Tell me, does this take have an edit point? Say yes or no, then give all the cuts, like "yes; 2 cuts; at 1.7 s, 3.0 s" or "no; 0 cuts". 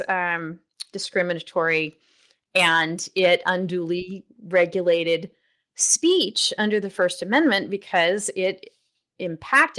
no; 0 cuts